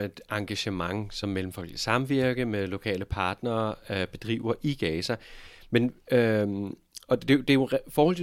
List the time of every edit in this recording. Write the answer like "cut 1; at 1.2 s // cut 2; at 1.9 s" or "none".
none

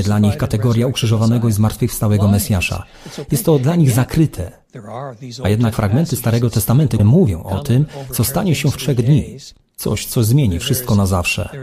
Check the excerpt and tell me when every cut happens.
cut 1; at 5.7 s // cut 2; at 7.0 s // cut 3; at 8.8 s

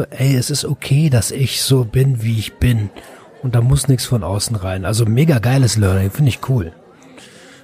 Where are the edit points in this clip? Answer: none

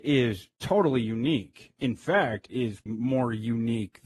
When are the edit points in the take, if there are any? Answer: cut 1; at 1.8 s // cut 2; at 2.5 s // cut 3; at 2.9 s

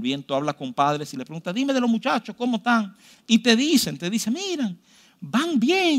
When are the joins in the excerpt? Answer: none

